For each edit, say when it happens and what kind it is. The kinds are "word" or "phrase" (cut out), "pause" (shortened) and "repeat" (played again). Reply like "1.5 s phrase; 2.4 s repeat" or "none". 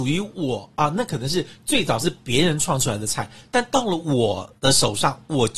4.6 s pause